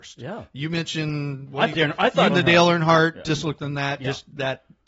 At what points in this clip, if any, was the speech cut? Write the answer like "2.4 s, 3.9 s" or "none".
1.7 s, 2.3 s, 3.3 s, 3.6 s